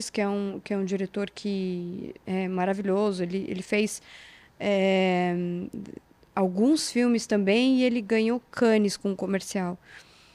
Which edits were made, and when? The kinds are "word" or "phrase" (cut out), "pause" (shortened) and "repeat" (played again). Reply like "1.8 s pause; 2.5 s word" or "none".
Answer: none

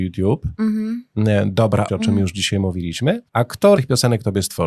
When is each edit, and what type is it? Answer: 1.9 s word; 3.3 s pause; 3.8 s word

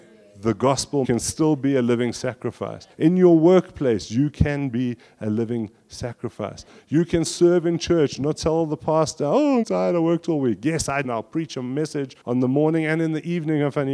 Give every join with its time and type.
1.0 s phrase; 2.9 s pause; 7.2 s word; 9.6 s phrase; 11.0 s phrase; 12.2 s pause

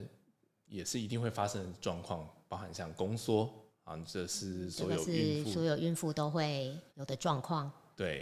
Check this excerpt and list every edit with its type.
6.9 s pause

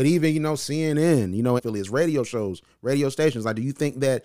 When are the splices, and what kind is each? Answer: 1.6 s phrase

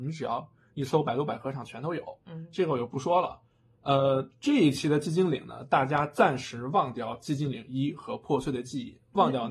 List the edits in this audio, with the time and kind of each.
none

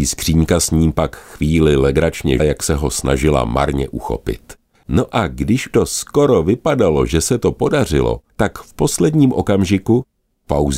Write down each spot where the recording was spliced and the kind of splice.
2.4 s word; 4.7 s pause; 5.7 s word; 8.3 s pause

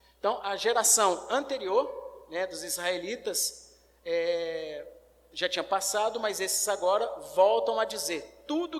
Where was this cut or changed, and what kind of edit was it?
none

